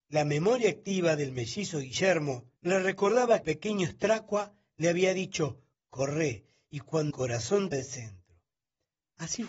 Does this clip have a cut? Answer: yes; 5 cuts; at 2.6 s, 3.4 s, 5.7 s, 7.1 s, 7.7 s

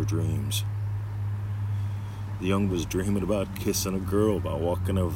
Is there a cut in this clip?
yes; 1 cut; at 2.7 s

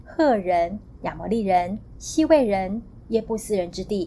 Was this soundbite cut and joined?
no; 0 cuts

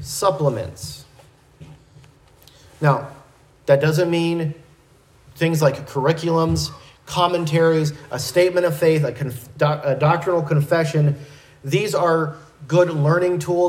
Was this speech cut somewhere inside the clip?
no; 0 cuts

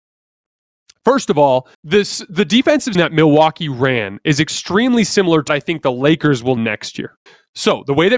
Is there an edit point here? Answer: yes; 5 cuts; at 1.7 s, 2.9 s, 5.5 s, 6.6 s, 7.3 s

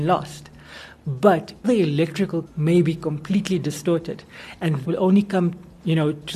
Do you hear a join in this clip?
yes; 3 cuts; at 1.6 s, 2.4 s, 4.8 s

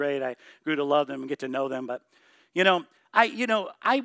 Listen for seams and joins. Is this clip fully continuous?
yes; 0 cuts

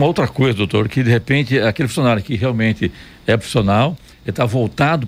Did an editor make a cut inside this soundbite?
no; 0 cuts

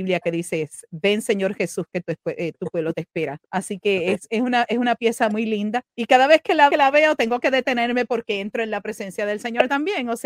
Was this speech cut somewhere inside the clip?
yes; 3 cuts; at 3.5 s, 5.9 s, 6.7 s

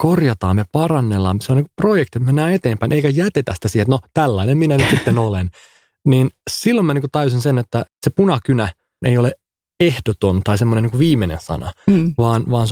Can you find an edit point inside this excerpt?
no; 0 cuts

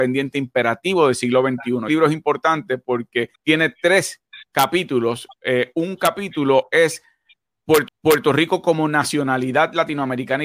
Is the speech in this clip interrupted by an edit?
yes; 4 cuts; at 1.9 s, 3.4 s, 4.5 s, 7.9 s

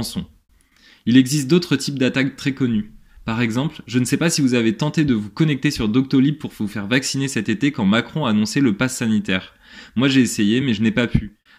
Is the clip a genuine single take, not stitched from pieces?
yes; 0 cuts

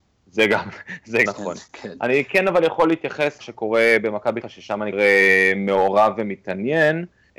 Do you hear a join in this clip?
yes; 4 cuts; at 1.3 s, 3.4 s, 4.4 s, 4.9 s

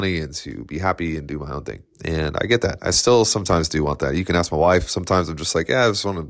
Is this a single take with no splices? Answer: yes; 0 cuts

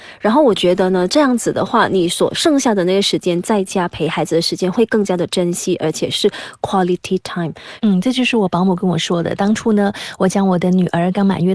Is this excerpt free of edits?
yes; 0 cuts

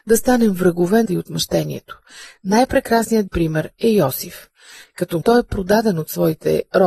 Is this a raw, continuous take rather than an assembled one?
no; 3 cuts; at 1.1 s, 3.3 s, 5.2 s

